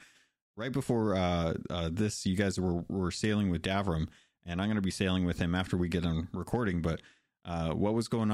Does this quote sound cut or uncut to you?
uncut